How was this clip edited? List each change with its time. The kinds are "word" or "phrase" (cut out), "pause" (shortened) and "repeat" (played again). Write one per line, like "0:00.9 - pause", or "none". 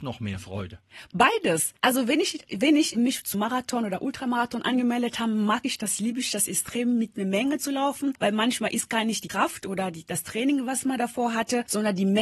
0:03.0 - word
0:03.3 - word